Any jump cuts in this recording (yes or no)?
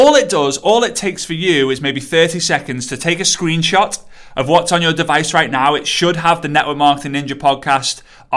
no